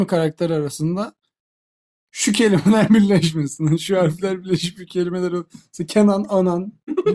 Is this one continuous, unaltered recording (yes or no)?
yes